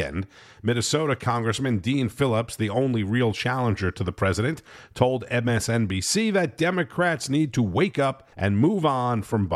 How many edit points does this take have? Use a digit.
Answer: 1